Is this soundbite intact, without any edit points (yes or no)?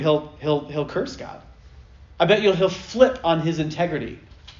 yes